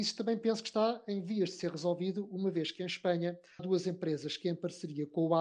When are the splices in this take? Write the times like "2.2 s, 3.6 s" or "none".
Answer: 3.6 s